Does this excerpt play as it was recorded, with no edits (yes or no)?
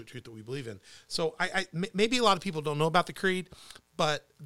yes